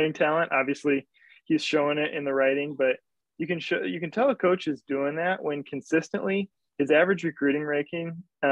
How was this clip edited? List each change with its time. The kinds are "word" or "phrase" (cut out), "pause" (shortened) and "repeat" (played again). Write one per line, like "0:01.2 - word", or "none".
none